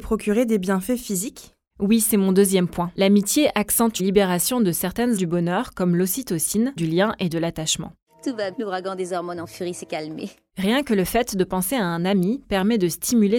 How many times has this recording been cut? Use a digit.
4